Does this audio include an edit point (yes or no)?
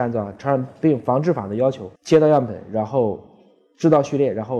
yes